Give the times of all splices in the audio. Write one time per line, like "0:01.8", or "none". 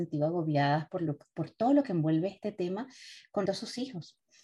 0:03.5